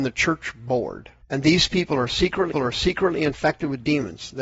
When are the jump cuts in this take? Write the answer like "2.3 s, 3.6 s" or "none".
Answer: 1.2 s, 2.5 s